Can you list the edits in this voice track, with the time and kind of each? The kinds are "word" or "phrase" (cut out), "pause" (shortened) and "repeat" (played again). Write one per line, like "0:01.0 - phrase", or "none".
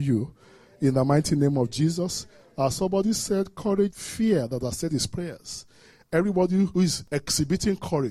0:03.9 - word

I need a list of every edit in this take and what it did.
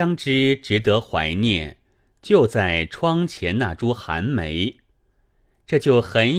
none

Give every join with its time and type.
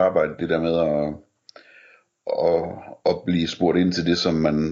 none

